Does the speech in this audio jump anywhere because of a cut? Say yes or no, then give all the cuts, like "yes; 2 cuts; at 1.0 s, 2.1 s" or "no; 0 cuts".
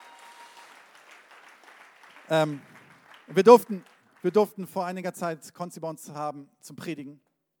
no; 0 cuts